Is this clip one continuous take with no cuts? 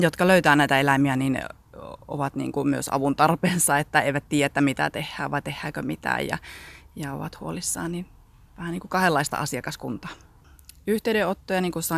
yes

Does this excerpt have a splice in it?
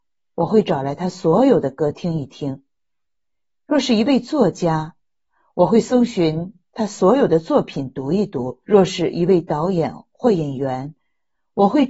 yes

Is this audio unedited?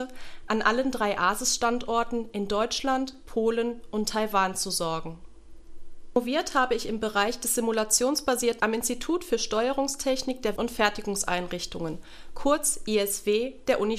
no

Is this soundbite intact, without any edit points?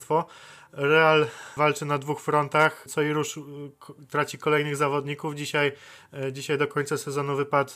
yes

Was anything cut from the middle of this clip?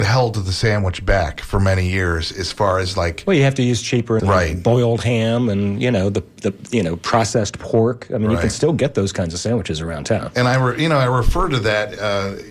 yes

